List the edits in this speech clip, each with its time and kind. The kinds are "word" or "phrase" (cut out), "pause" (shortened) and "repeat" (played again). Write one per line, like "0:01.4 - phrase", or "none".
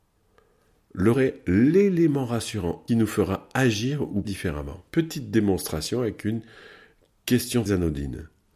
0:01.1 - word
0:02.9 - phrase
0:04.2 - word
0:04.9 - pause
0:07.7 - word

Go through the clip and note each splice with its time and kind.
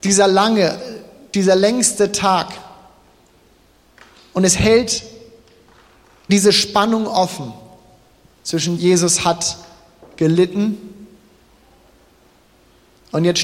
0:06.3 - word
0:08.8 - word

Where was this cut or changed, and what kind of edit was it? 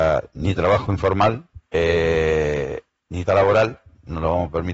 0:01.7 - pause
0:03.3 - word

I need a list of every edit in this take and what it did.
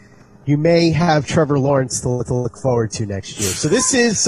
0:02.3 - repeat

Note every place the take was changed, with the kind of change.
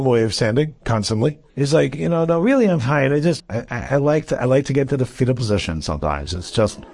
0:01.5 - pause
0:03.4 - word

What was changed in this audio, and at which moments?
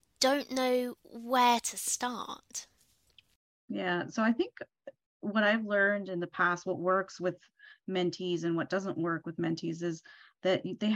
none

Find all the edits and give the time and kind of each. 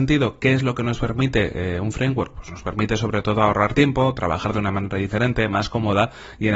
none

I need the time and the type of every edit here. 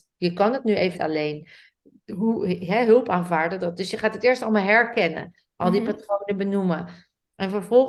0:00.9 - word

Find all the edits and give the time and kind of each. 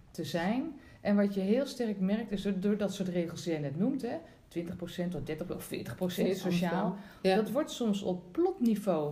none

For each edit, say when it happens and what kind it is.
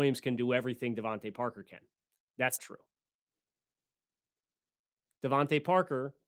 0:02.6 - word

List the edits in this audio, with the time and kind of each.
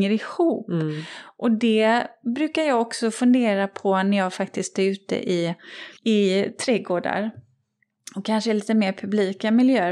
0:06.0 - pause

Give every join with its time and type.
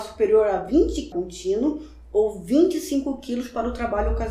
0:01.1 - phrase

